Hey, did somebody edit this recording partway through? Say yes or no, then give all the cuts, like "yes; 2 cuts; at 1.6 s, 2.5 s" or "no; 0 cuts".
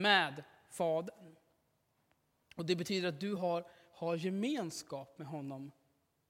no; 0 cuts